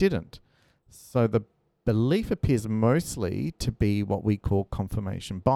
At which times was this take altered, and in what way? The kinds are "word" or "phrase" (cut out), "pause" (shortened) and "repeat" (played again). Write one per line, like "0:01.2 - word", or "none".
none